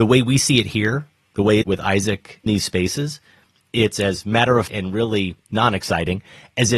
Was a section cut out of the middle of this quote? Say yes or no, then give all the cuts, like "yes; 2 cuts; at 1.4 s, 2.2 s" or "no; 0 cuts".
yes; 4 cuts; at 1.6 s, 2.5 s, 4.7 s, 5.4 s